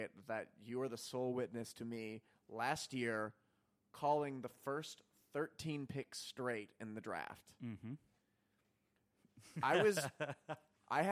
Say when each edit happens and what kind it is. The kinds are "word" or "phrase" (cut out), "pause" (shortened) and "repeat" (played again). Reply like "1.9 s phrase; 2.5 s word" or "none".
none